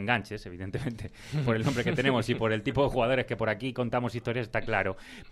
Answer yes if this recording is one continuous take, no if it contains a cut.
yes